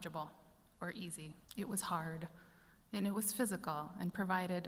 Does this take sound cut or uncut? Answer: cut